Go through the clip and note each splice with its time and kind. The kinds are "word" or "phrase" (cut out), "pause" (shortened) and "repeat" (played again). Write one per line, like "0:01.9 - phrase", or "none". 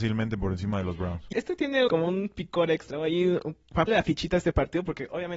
0:01.3 - word
0:01.9 - word
0:03.9 - word